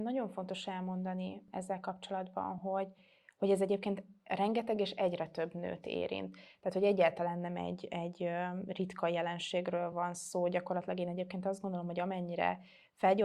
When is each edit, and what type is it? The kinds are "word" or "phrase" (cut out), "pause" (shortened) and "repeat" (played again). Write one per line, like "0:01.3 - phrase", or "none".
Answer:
none